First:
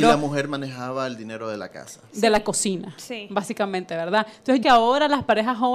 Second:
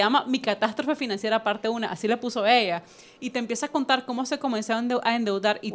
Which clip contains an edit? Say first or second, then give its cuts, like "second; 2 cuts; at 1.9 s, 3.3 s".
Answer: first; 1 cut; at 4.6 s